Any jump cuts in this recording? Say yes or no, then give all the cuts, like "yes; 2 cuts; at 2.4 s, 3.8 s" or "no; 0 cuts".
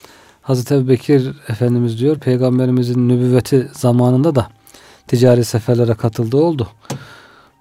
no; 0 cuts